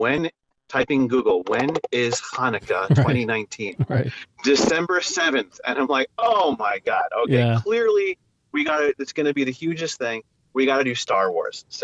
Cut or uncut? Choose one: uncut